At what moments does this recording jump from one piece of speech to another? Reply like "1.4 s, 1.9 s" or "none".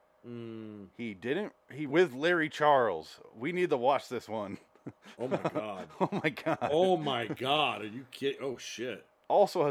0.9 s, 1.9 s